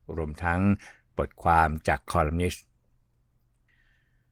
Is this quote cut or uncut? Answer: uncut